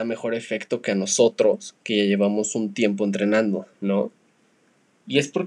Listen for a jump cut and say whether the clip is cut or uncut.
cut